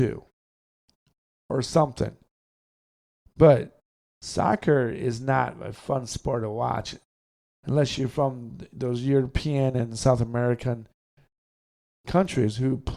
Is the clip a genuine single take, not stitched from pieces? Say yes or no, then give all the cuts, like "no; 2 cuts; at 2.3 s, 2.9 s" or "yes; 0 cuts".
yes; 0 cuts